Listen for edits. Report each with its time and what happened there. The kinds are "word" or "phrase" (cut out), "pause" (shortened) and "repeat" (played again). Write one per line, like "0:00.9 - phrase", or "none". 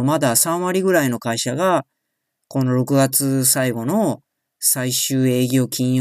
none